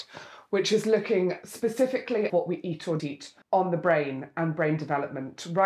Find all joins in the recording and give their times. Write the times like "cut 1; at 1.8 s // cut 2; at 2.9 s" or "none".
cut 1; at 2.3 s // cut 2; at 3.0 s // cut 3; at 3.4 s